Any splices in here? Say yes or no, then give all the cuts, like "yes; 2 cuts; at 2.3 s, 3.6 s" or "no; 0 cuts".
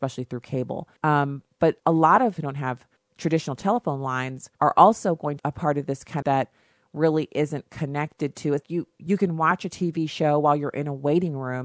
yes; 8 cuts; at 1.0 s, 1.8 s, 2.4 s, 3.0 s, 4.5 s, 5.4 s, 6.2 s, 8.6 s